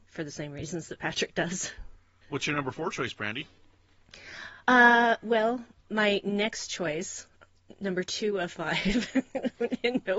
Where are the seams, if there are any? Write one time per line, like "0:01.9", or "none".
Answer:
0:02.2